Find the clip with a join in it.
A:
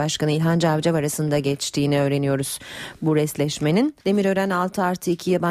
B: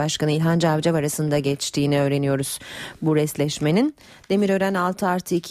A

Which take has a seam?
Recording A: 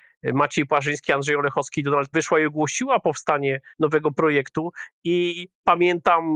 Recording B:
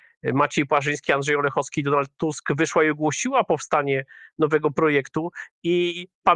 A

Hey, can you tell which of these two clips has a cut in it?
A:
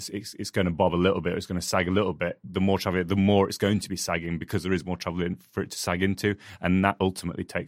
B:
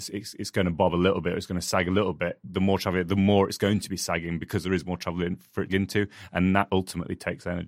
B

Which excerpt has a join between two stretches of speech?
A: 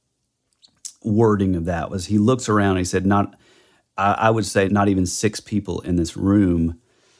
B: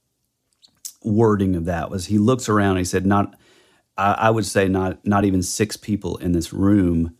A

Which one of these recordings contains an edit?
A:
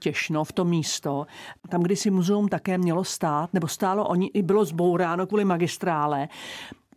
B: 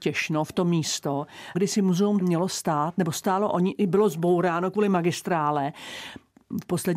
B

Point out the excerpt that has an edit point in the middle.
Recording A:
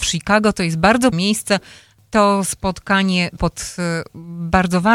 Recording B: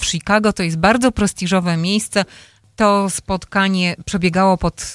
A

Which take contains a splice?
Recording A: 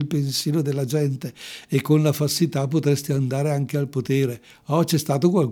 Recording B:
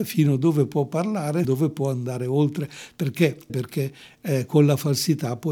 B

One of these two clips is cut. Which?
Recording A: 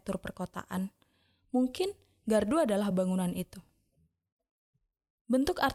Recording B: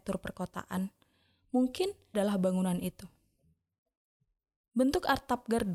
B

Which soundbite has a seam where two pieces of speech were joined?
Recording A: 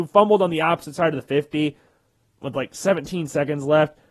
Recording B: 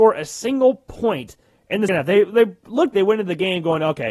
B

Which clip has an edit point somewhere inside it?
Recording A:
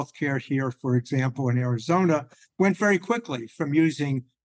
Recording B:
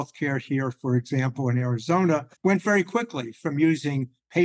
B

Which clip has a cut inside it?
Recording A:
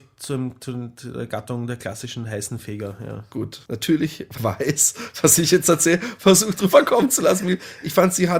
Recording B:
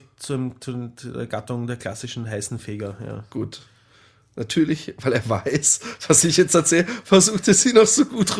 A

